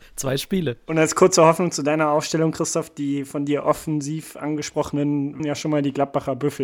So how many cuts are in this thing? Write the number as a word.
one